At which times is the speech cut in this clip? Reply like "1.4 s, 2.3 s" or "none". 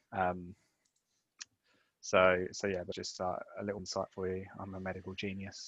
2.9 s, 3.8 s